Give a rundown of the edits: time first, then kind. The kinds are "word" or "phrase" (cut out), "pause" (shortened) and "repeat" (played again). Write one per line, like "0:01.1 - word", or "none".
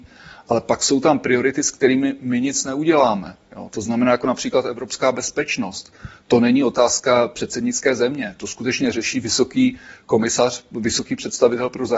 none